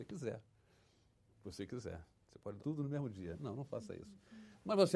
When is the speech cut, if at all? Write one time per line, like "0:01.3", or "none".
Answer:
0:02.1
0:02.6

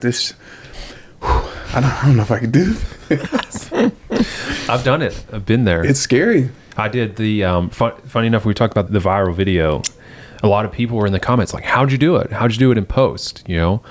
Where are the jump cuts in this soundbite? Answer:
0:08.9

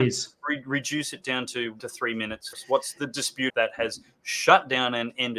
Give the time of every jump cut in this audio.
0:01.8
0:02.5
0:03.5

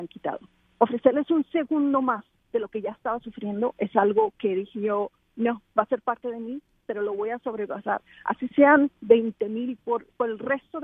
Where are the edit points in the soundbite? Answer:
none

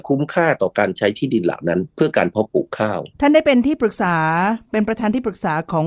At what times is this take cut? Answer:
0:03.1

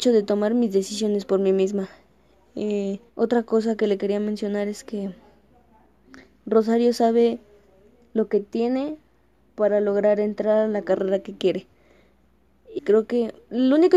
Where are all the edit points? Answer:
0:03.1
0:12.8

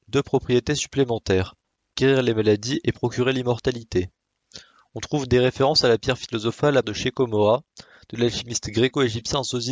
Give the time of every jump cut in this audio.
0:06.8

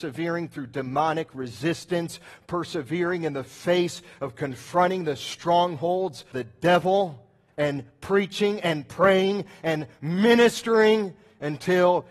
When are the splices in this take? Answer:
0:06.3

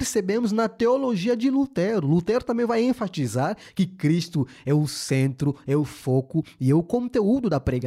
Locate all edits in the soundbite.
none

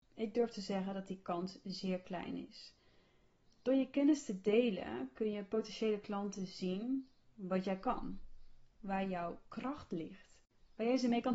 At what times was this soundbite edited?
none

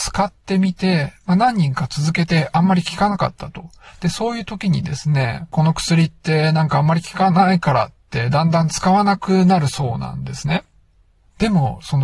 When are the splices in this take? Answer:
none

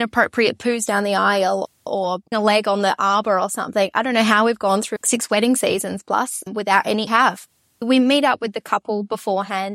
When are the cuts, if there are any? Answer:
0:02.3
0:05.0
0:07.1

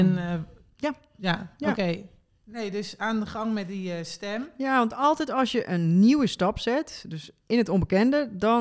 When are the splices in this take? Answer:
none

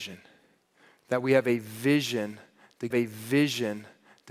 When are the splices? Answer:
0:02.9

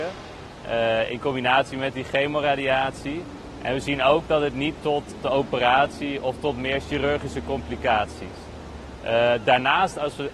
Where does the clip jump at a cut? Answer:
0:04.8
0:05.2

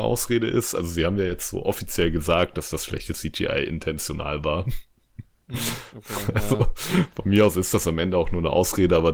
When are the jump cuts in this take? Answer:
0:05.4

